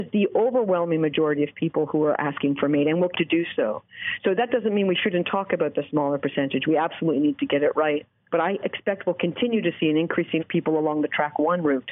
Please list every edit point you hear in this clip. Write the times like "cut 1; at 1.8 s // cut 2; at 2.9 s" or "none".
cut 1; at 3.1 s // cut 2; at 10.4 s